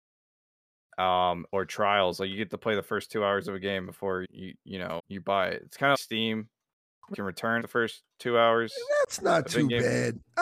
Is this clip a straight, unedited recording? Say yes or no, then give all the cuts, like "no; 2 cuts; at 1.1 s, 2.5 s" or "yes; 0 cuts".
no; 5 cuts; at 4.2 s, 5.0 s, 5.9 s, 7.1 s, 7.6 s